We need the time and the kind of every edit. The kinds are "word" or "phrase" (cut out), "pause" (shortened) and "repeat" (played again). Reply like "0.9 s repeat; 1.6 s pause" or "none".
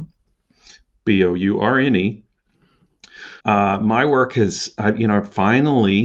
3.4 s pause